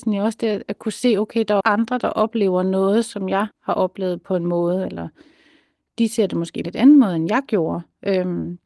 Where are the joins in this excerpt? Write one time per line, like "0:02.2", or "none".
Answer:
0:01.6
0:03.5
0:06.6